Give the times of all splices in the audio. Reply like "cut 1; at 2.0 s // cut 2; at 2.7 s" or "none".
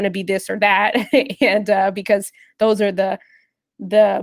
none